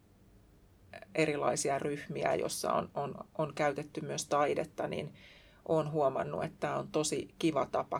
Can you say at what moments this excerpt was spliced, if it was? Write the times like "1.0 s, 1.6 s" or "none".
none